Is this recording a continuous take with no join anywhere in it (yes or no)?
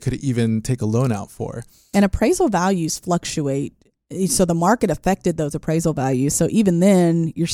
yes